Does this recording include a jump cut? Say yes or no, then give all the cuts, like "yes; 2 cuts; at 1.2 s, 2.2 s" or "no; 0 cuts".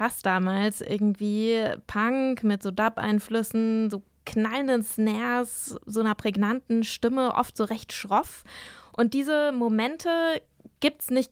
no; 0 cuts